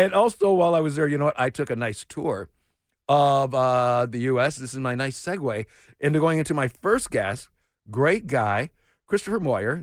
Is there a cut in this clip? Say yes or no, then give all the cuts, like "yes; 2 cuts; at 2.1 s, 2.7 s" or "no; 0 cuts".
no; 0 cuts